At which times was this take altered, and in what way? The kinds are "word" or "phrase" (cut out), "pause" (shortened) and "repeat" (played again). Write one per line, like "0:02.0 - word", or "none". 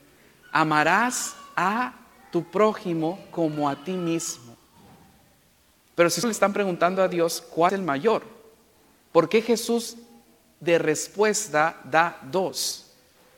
0:06.2 - word
0:07.7 - word